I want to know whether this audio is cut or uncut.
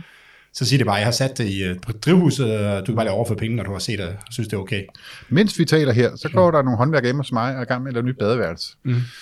uncut